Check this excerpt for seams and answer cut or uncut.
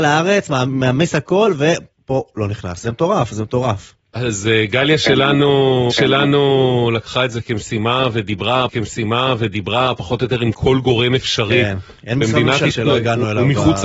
cut